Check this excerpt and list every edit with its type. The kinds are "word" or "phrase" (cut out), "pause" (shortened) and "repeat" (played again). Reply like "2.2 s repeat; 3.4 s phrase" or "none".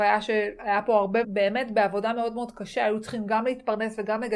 1.2 s phrase